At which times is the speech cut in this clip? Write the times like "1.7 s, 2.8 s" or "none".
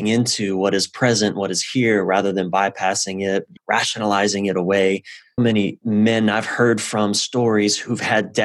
3.6 s, 5.4 s